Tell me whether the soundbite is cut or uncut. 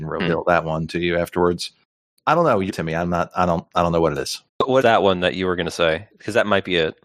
cut